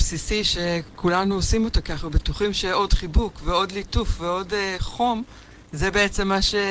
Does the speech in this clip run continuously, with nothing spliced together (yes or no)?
yes